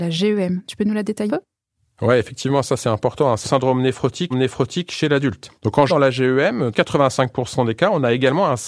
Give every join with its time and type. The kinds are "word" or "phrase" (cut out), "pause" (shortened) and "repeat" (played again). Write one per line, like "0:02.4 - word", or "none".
0:01.3 - word
0:03.4 - phrase
0:04.3 - repeat
0:05.6 - pause
0:05.9 - word
0:06.7 - phrase